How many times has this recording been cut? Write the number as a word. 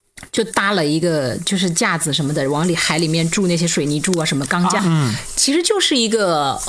one